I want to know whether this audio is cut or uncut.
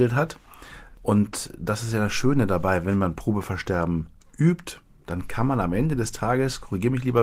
uncut